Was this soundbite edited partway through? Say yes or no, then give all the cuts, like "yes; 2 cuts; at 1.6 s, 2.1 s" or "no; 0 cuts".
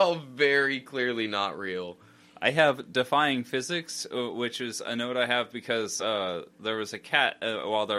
no; 0 cuts